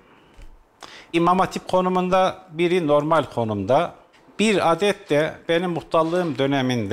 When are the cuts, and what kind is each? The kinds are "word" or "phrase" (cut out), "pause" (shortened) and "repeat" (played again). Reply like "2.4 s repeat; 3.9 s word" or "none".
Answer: 1.1 s word; 4.1 s pause